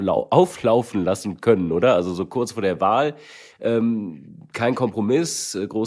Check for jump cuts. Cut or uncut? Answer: uncut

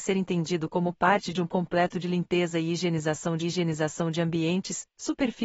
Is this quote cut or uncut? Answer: cut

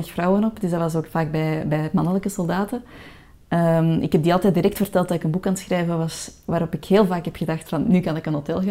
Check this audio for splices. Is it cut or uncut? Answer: uncut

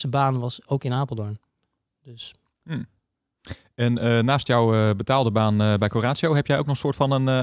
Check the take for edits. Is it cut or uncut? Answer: uncut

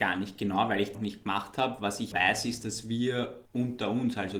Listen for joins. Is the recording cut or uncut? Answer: cut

